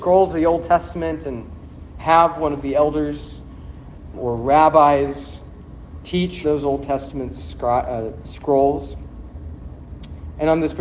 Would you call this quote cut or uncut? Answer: cut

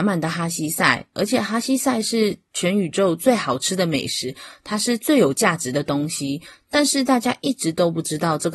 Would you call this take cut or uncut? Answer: uncut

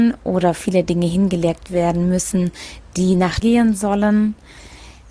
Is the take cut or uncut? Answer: cut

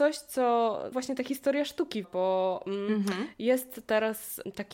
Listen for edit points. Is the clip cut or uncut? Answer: cut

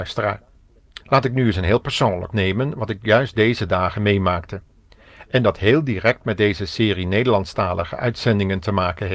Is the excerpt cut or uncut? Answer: cut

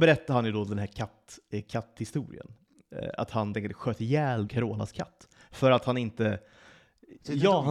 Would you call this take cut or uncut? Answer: cut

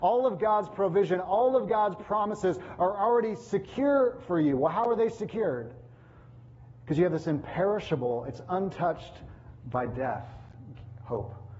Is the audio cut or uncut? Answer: uncut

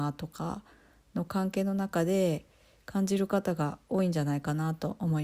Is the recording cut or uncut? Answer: uncut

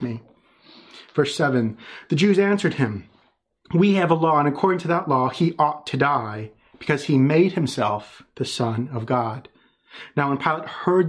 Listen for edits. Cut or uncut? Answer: uncut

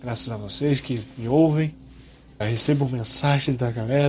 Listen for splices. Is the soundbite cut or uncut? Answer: cut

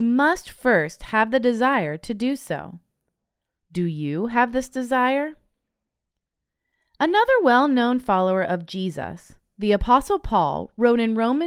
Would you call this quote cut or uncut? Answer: uncut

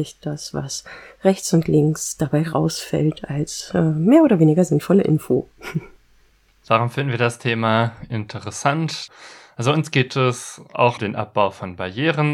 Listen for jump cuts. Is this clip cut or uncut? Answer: cut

